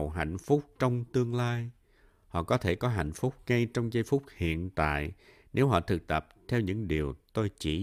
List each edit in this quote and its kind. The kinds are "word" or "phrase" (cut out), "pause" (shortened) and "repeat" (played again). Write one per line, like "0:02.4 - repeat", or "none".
none